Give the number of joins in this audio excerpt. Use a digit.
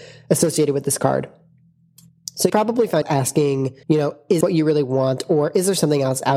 4